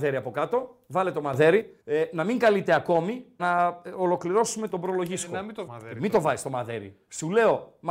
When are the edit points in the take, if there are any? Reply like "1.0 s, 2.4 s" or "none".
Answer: 1.8 s, 3.4 s, 4.7 s, 5.7 s